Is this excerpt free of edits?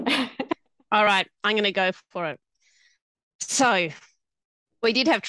yes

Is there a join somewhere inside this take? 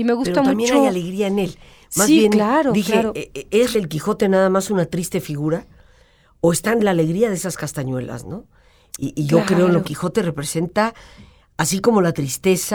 yes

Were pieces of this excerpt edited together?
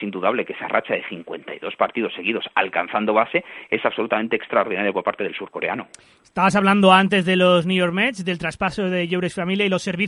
no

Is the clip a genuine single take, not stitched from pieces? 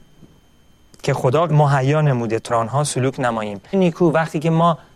no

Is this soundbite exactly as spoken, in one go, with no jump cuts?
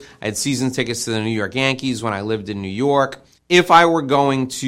yes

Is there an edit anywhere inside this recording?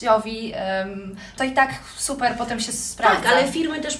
yes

